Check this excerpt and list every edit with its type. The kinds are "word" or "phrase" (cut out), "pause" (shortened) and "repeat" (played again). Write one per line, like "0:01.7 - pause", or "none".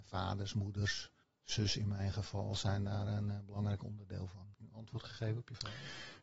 0:01.2 - pause
0:04.5 - pause